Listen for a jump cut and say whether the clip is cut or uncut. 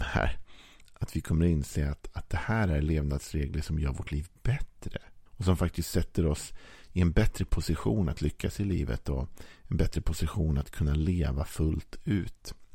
cut